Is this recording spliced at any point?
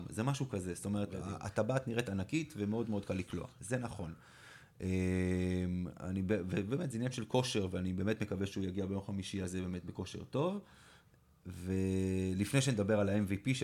no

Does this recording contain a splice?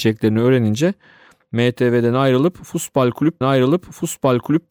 yes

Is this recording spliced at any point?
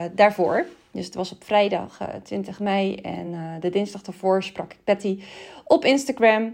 no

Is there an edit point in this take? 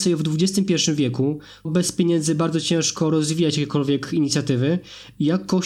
yes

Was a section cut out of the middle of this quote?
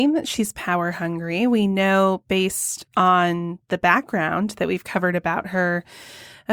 no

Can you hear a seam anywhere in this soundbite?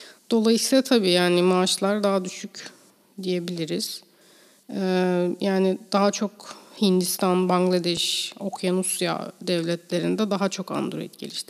no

